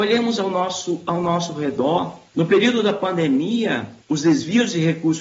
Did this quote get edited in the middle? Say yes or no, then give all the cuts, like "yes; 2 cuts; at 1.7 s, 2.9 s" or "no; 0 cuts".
yes; 2 cuts; at 2.3 s, 4.0 s